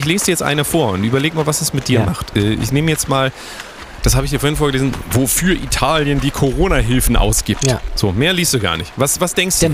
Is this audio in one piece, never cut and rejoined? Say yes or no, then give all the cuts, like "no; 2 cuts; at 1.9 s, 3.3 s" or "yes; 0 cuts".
yes; 0 cuts